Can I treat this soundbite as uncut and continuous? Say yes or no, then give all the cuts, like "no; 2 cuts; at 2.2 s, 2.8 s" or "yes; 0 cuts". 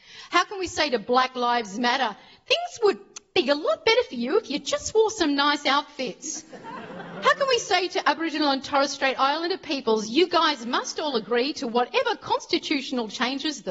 yes; 0 cuts